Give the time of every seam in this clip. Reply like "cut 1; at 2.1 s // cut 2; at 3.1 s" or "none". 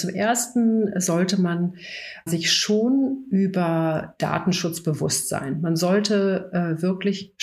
cut 1; at 2.3 s